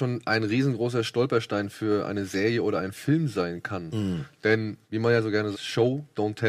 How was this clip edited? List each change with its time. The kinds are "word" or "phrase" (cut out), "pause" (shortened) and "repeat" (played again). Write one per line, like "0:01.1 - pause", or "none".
0:04.8 - pause
0:05.5 - word